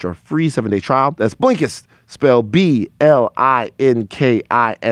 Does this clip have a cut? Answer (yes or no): no